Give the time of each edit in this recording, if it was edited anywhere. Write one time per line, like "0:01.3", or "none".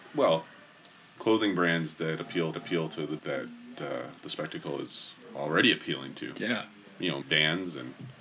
0:02.5
0:03.2
0:04.2
0:05.2
0:07.2